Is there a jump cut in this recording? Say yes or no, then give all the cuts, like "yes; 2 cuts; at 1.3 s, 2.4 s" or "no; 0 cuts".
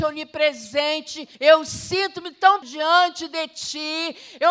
yes; 2 cuts; at 1.3 s, 2.6 s